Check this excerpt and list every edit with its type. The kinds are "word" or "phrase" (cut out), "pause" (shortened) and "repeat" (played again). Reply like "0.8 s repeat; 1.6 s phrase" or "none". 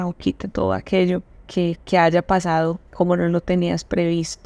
1.4 s pause; 2.9 s pause